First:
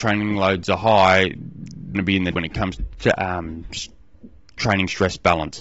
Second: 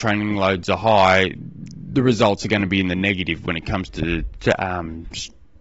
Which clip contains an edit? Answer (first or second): first